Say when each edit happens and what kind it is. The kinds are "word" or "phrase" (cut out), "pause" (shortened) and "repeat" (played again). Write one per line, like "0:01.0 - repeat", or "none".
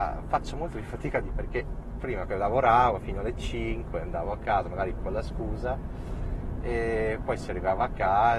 0:01.3 - word
0:02.3 - word
0:05.0 - word

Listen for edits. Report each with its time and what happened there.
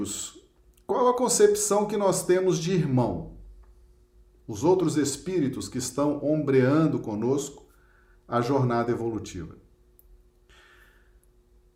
none

